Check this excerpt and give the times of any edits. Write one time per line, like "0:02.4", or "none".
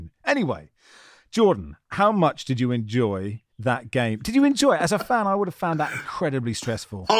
0:03.5